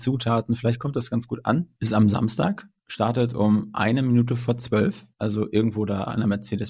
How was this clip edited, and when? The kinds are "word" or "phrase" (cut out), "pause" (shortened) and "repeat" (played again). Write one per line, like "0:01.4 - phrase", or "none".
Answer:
0:01.8 - pause
0:02.8 - pause
0:05.1 - pause